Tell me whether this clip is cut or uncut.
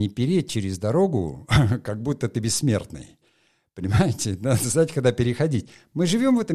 uncut